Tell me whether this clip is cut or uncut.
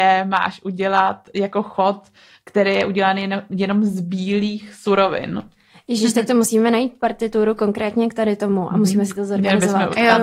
uncut